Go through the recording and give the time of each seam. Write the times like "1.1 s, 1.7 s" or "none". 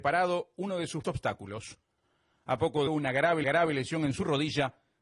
1.0 s, 2.9 s, 3.4 s